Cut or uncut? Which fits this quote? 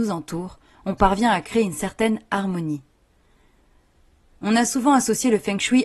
uncut